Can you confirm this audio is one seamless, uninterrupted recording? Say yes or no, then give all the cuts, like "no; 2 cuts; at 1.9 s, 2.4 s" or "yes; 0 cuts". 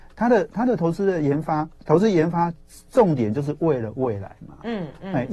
yes; 0 cuts